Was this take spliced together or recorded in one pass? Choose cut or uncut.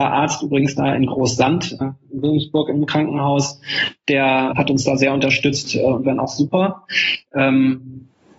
cut